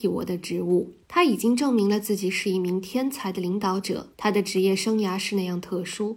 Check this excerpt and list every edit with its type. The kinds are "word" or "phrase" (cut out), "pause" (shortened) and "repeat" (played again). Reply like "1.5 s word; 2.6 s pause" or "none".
1.0 s pause; 4.1 s pause